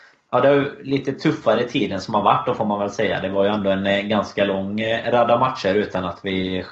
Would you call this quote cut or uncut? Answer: uncut